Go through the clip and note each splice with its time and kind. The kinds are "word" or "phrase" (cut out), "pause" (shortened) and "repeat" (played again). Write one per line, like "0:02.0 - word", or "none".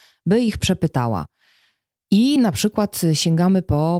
none